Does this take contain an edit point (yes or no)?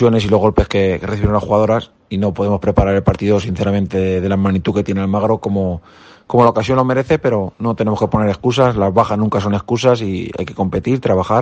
no